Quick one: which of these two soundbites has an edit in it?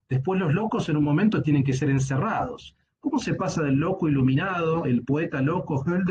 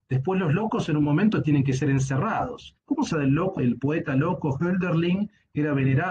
second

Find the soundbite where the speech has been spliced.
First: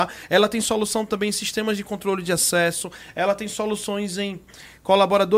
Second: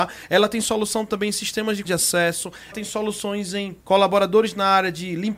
second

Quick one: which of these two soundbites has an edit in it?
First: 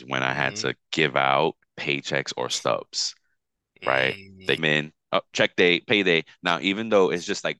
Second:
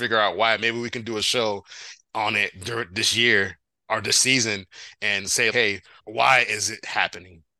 first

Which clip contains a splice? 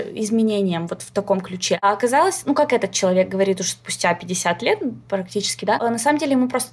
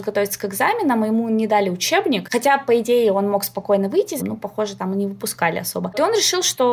second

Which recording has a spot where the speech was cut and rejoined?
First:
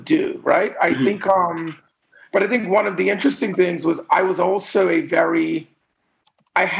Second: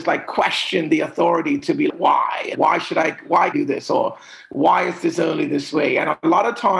second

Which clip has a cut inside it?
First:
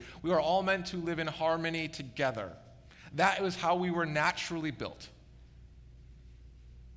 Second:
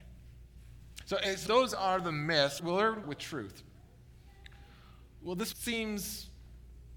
second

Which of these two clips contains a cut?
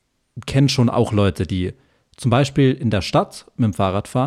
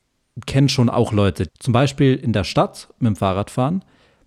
second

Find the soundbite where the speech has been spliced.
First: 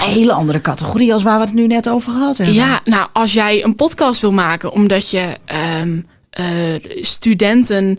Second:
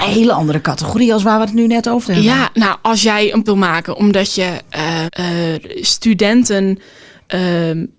second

